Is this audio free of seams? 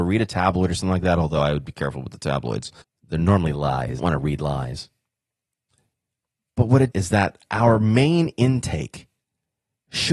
no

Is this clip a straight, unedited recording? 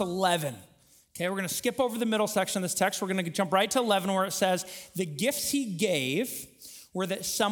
yes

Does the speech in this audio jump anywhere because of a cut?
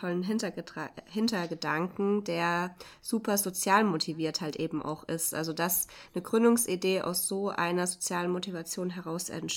no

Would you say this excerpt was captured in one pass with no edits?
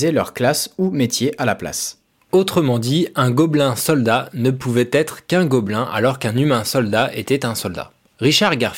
yes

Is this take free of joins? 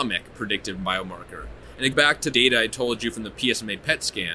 no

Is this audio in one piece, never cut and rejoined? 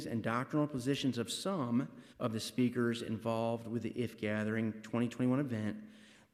no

